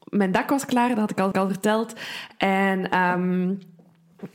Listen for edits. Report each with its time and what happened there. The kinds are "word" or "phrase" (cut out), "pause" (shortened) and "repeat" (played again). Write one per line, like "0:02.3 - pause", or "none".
0:01.3 - repeat

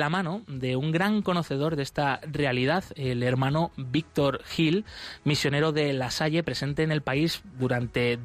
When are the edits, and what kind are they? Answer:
none

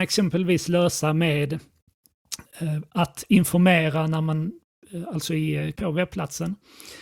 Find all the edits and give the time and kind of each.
0:05.8 - word

